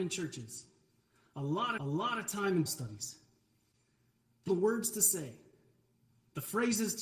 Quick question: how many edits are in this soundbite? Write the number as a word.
three